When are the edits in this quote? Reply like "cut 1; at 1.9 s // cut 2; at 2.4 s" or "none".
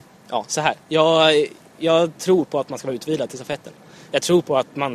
none